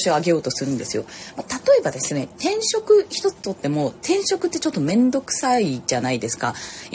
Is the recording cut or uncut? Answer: uncut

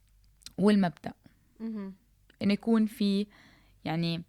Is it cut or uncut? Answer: uncut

